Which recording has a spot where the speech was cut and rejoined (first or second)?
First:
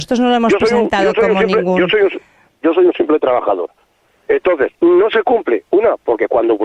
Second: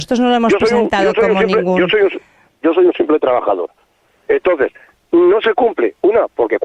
first